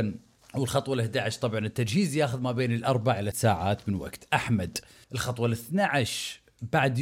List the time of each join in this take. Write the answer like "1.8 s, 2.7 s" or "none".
3.3 s, 5.0 s